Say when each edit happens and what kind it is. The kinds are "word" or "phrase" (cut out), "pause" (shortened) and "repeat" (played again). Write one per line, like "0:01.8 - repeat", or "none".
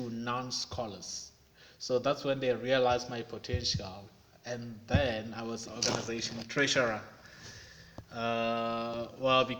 0:05.7 - phrase